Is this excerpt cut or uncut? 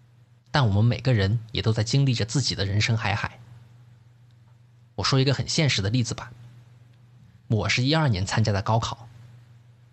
uncut